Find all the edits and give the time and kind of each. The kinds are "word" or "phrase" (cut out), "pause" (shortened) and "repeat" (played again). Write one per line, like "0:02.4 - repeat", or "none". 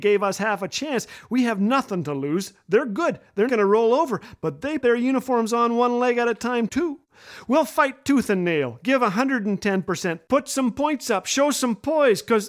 0:03.5 - word
0:04.8 - word